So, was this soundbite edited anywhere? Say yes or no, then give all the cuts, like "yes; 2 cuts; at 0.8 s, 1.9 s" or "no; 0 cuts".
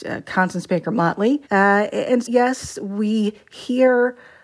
yes; 2 cuts; at 1.4 s, 2.2 s